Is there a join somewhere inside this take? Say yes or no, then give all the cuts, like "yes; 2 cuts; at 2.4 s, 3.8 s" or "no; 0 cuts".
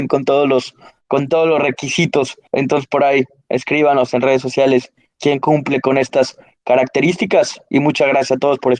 yes; 1 cut; at 2.5 s